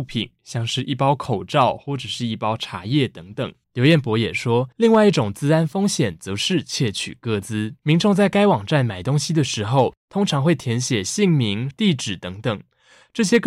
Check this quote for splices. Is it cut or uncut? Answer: cut